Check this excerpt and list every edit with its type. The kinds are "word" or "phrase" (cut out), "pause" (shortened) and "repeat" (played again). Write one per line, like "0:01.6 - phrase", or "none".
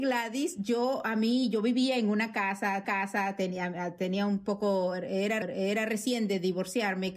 0:02.8 - repeat
0:05.4 - repeat

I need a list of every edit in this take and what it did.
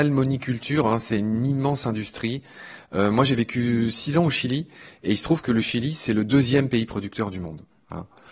none

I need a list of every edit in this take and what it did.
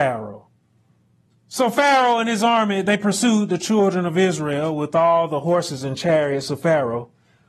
0:01.1 - pause

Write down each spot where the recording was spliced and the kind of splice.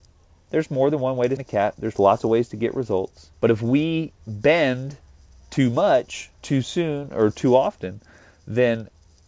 0:01.4 - word
0:03.3 - pause
0:04.2 - pause
0:06.3 - pause

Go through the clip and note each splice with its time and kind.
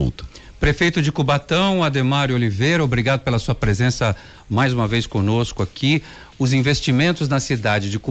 none

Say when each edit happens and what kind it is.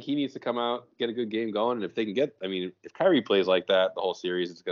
none

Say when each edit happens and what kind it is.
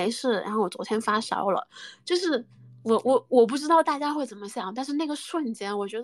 none

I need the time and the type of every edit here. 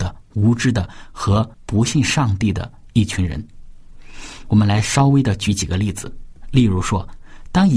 0:01.5 - pause

